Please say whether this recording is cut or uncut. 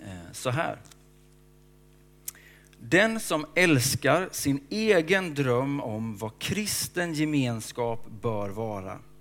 uncut